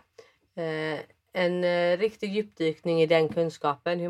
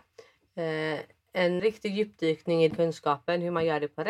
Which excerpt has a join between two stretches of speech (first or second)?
second